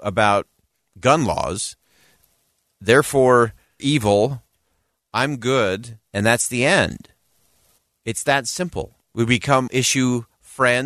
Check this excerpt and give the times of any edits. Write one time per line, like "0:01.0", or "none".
0:03.8
0:06.1
0:07.8
0:09.0
0:09.7